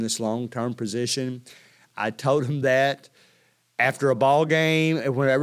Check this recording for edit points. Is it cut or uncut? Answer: uncut